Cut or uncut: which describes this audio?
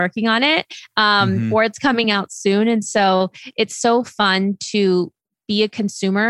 uncut